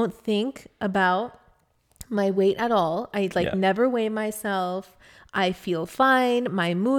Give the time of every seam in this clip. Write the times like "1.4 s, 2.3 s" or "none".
none